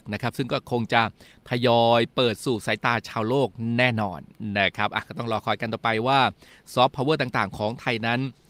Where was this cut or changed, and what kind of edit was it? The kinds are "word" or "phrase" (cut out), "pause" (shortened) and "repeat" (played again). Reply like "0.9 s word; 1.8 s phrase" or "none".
none